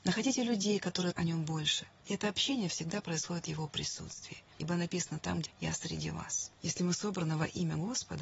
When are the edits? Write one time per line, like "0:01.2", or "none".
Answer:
0:01.1
0:05.5